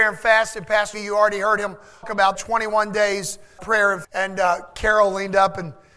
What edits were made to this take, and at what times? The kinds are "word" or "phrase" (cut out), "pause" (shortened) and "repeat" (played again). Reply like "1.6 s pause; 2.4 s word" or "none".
0.9 s word; 2.0 s word; 2.3 s word; 3.6 s word; 4.0 s word